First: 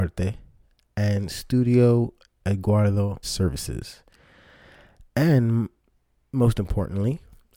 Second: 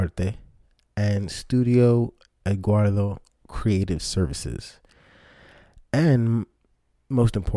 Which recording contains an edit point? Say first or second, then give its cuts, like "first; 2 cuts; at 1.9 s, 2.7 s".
first; 1 cut; at 3.2 s